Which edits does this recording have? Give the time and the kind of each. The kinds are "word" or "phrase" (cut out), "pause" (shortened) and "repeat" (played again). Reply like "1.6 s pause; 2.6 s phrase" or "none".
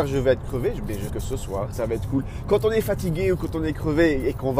1.1 s word; 1.7 s word